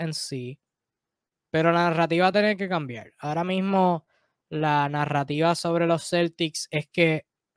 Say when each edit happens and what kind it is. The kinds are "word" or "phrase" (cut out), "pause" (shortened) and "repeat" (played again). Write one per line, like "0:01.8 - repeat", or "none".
none